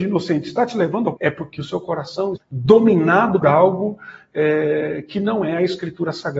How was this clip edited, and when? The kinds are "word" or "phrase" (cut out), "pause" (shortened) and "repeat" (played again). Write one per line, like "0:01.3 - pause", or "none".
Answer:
0:01.2 - word
0:02.4 - word
0:03.4 - word